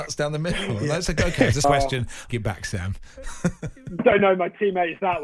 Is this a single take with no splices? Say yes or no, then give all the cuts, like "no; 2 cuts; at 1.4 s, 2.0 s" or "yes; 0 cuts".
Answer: no; 3 cuts; at 1.6 s, 2.3 s, 4.0 s